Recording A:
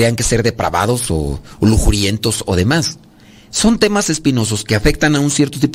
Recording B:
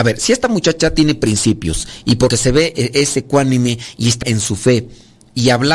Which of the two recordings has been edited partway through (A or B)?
B